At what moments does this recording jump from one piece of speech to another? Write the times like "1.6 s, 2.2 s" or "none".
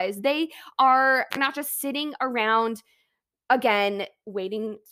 1.3 s

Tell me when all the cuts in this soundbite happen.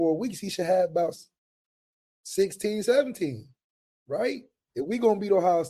4.7 s

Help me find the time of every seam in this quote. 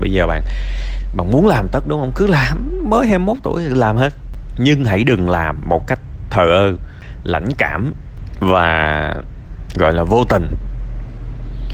none

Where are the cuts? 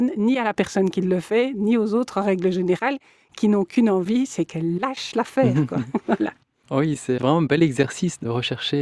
none

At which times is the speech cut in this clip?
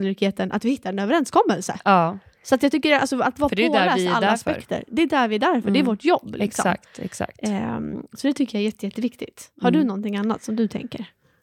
none

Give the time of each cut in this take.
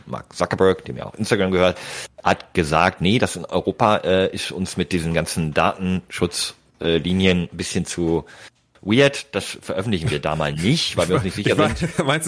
none

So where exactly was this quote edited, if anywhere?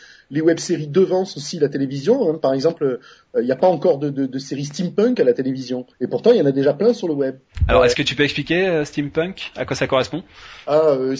5.9 s

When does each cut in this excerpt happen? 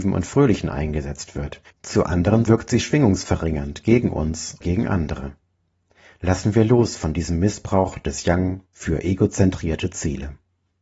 1.6 s, 2.5 s, 4.6 s

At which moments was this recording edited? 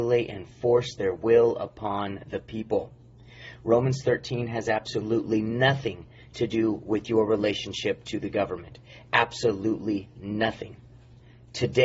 none

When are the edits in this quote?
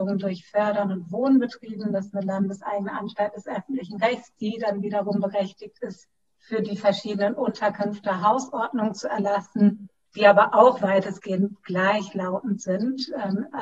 none

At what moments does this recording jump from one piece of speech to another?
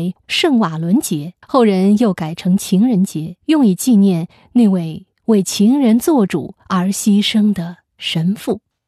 1.4 s, 3.4 s

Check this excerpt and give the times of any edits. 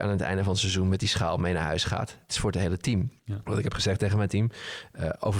3.2 s

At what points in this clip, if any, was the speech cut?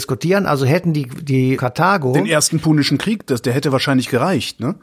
1.6 s

